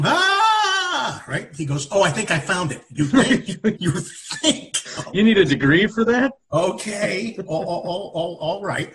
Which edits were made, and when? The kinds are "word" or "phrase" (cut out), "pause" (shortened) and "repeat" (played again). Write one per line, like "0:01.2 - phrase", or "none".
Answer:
0:03.8 - word